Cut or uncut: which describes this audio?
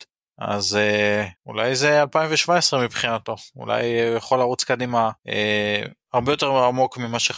cut